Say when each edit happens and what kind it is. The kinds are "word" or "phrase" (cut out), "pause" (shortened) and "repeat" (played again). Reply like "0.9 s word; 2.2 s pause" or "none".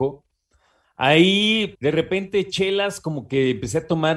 1.7 s phrase